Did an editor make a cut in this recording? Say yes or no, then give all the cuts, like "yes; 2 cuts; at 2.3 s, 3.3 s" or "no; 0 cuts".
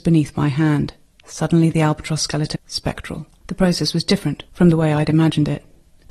yes; 3 cuts; at 1.1 s, 2.5 s, 3.4 s